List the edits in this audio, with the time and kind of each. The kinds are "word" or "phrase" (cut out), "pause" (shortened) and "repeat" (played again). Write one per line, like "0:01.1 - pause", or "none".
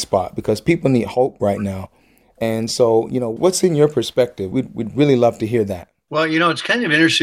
none